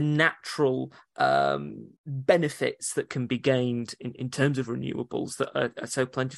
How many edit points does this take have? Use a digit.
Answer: 1